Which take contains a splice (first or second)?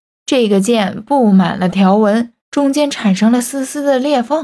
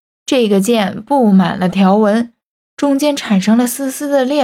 first